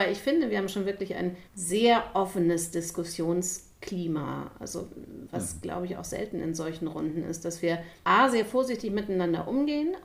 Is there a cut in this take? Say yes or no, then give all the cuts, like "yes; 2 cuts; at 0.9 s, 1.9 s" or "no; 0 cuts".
yes; 2 cuts; at 1.5 s, 8.0 s